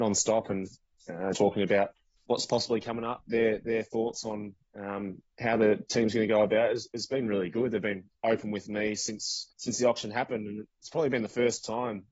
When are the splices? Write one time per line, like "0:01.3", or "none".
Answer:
0:01.3
0:02.2
0:09.5